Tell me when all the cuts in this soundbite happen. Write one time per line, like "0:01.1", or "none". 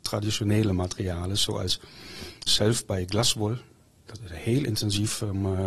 0:02.5